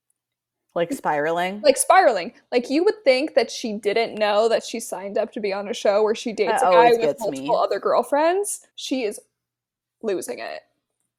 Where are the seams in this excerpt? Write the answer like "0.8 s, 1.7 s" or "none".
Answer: 8.7 s